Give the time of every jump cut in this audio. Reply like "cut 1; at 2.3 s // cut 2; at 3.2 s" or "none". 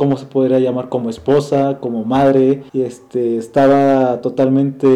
cut 1; at 2.7 s